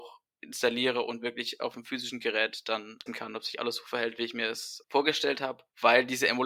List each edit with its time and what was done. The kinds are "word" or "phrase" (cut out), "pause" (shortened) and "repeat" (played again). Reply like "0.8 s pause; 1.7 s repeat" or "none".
3.1 s word